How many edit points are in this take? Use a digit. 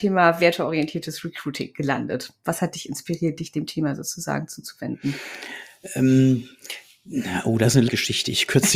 1